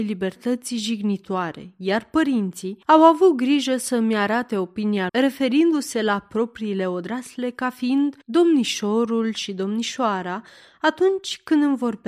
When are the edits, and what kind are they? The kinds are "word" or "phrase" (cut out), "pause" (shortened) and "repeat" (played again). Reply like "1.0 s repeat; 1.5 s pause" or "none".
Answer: 2.8 s pause; 5.1 s word; 8.2 s pause